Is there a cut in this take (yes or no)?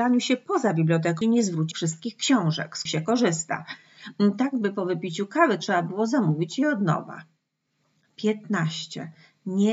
yes